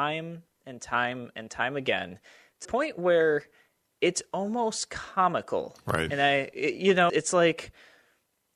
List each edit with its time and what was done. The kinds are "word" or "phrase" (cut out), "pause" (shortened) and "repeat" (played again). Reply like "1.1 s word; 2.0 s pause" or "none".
2.6 s word; 7.1 s word